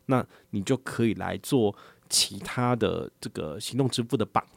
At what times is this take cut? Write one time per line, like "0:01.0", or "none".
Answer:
none